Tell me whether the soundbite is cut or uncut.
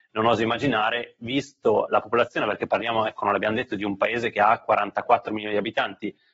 uncut